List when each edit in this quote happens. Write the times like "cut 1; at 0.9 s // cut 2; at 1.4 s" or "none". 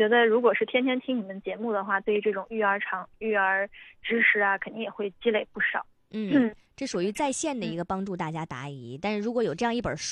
cut 1; at 6.6 s